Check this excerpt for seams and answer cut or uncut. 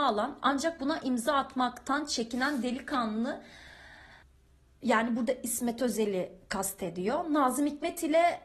cut